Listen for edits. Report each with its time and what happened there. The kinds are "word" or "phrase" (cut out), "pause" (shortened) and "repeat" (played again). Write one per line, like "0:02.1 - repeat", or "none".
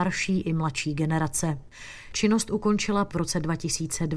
0:03.1 - word